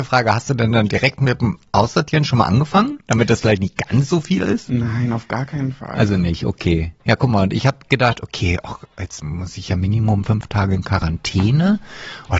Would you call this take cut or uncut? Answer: uncut